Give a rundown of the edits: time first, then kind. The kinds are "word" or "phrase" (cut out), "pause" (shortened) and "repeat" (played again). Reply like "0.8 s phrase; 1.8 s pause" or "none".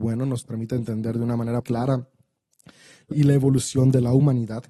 1.6 s word; 3.1 s word